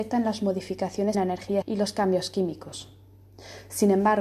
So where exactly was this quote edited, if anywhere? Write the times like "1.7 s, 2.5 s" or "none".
1.1 s, 1.6 s

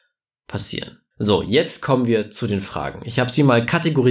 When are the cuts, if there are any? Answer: 1.1 s

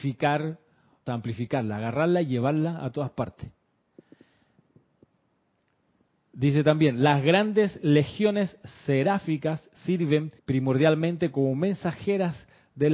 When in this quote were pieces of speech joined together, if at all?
1.1 s, 10.4 s

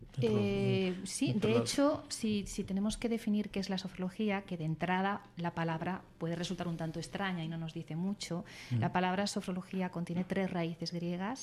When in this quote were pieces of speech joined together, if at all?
none

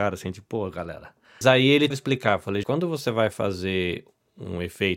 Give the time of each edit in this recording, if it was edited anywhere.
1.4 s, 1.9 s, 2.6 s

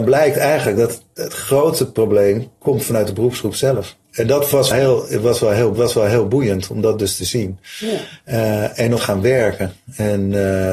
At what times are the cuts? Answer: 4.0 s, 4.7 s, 5.7 s, 9.0 s

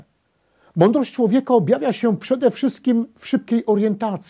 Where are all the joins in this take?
none

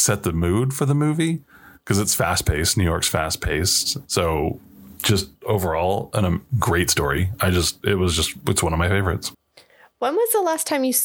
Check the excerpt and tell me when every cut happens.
none

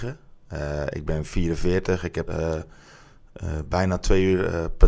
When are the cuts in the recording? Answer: 2.3 s

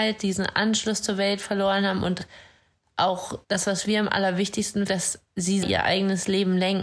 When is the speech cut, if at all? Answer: 3.4 s, 4.9 s, 5.6 s

